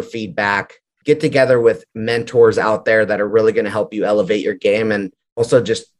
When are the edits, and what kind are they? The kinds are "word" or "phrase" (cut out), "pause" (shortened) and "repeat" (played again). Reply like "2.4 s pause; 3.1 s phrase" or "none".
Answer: none